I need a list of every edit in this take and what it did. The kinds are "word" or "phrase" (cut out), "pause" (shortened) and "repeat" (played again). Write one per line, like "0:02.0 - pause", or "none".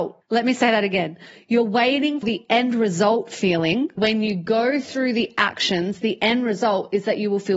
0:02.2 - word
0:04.0 - word